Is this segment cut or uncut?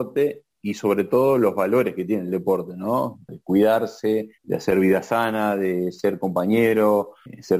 cut